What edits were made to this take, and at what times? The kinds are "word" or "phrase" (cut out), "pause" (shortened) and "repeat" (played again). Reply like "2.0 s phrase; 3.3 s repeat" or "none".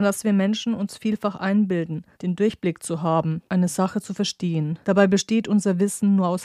2.1 s pause; 3.5 s pause; 4.8 s pause